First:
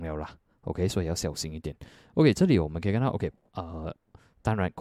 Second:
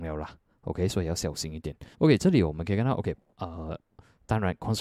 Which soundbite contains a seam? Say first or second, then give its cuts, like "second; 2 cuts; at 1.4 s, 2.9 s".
second; 1 cut; at 1.9 s